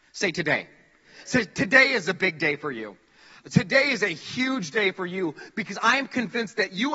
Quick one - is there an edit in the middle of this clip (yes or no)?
no